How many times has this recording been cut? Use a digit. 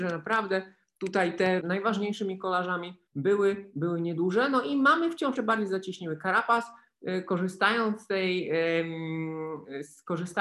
3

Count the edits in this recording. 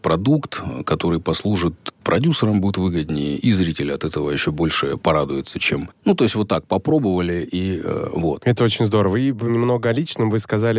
0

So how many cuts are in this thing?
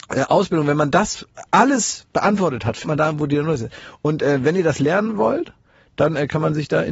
1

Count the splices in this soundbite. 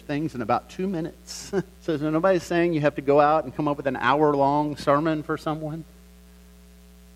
1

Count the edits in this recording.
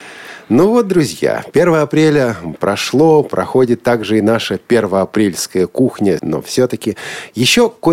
1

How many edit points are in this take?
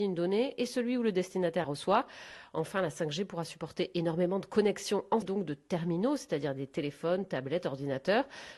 2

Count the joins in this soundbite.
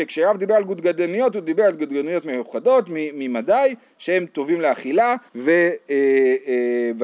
1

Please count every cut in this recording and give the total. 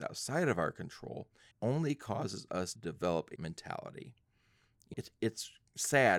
4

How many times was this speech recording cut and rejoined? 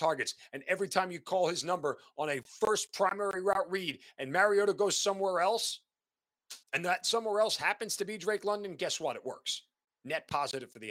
1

